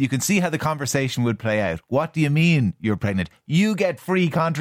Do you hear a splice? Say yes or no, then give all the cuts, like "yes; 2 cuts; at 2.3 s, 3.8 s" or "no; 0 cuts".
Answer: no; 0 cuts